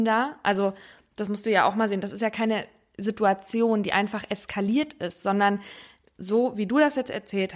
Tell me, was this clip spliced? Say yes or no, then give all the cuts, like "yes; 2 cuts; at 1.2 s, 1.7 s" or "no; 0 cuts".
no; 0 cuts